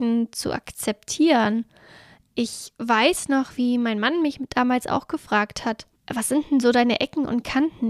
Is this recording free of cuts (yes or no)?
no